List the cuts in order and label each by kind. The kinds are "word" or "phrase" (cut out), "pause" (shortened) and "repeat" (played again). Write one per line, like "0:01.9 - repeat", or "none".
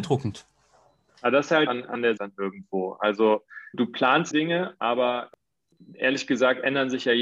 0:01.7 - phrase
0:02.2 - word
0:03.7 - word
0:04.3 - phrase